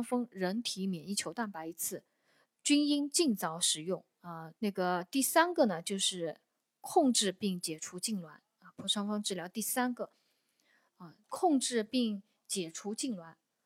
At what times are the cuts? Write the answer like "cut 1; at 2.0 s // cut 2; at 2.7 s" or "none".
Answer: cut 1; at 4.1 s // cut 2; at 4.6 s // cut 3; at 11.2 s